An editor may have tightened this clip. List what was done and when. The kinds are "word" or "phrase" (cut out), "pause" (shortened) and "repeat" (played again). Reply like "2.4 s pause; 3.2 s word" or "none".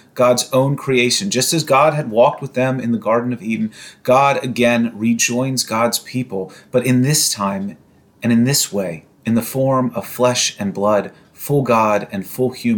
9.1 s pause